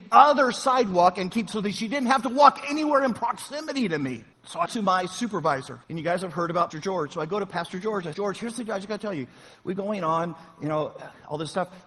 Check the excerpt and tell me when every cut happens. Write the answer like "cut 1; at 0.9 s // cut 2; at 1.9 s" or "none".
cut 1; at 1.5 s // cut 2; at 4.3 s // cut 3; at 4.7 s // cut 4; at 5.8 s // cut 5; at 6.7 s // cut 6; at 8.1 s // cut 7; at 9.8 s